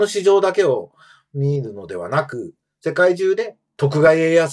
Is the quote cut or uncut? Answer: uncut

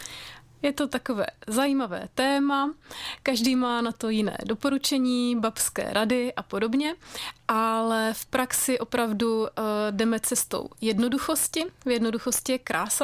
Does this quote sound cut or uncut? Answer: uncut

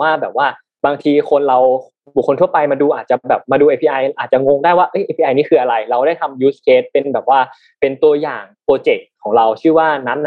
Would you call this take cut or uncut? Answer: uncut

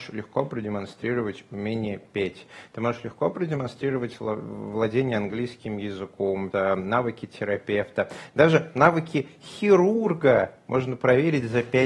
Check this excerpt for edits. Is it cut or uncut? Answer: cut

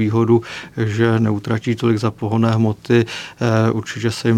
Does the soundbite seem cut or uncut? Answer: uncut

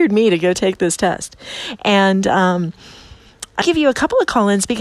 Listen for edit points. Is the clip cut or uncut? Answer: cut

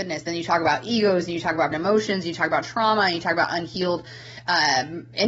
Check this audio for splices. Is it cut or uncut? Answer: cut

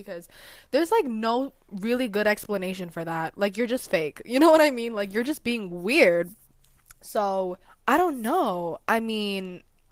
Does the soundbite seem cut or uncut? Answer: cut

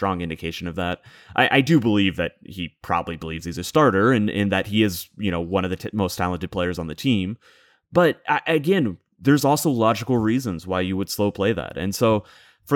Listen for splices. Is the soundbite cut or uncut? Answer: uncut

